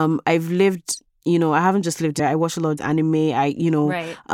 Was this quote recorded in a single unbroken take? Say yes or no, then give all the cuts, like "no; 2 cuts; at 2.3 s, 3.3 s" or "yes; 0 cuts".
no; 2 cuts; at 2.2 s, 2.8 s